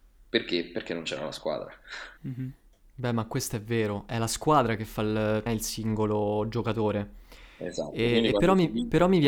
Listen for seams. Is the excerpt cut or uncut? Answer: cut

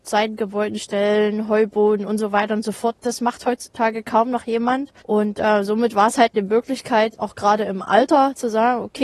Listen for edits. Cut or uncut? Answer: cut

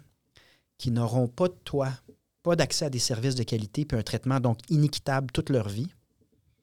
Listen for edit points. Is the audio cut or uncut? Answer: uncut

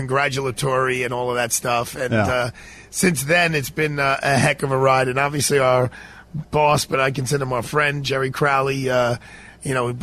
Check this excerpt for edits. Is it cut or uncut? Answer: uncut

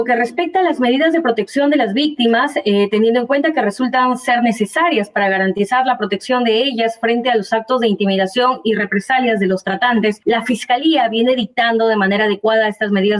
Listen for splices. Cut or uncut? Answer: uncut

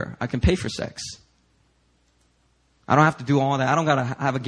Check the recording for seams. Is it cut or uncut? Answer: uncut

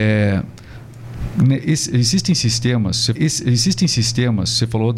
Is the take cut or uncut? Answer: cut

